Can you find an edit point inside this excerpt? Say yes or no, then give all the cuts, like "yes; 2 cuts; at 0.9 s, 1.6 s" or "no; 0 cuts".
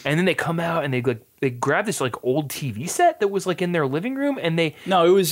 no; 0 cuts